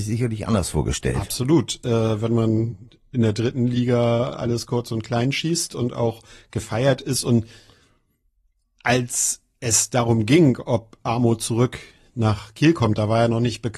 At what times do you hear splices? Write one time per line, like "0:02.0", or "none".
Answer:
none